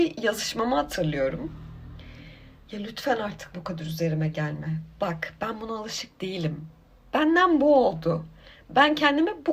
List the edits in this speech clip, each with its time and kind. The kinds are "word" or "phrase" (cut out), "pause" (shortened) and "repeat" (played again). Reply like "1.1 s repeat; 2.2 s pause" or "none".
none